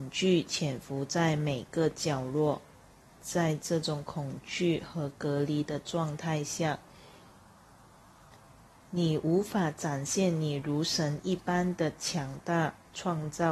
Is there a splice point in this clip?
no; 0 cuts

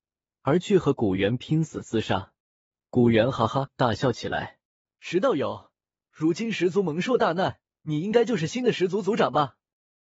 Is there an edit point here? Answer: yes; 3 cuts; at 2.4 s, 4.7 s, 7.8 s

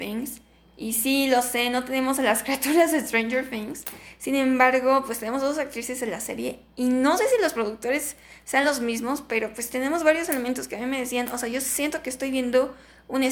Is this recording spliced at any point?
no; 0 cuts

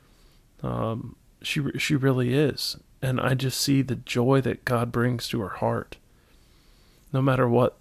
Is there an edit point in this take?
no; 0 cuts

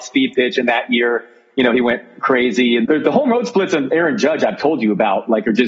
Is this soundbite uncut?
no; 1 cut; at 2.8 s

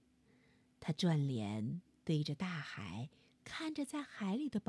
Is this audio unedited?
yes; 0 cuts

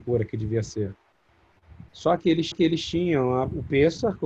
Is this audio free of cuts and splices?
no; 2 cuts; at 1.9 s, 2.5 s

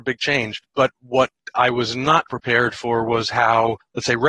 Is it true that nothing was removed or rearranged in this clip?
no; 1 cut; at 2.3 s

